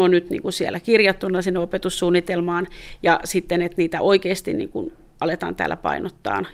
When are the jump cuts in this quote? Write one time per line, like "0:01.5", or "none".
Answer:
none